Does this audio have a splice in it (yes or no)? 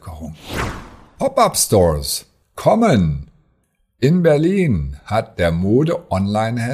no